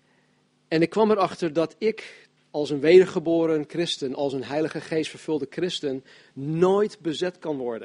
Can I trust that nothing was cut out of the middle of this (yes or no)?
no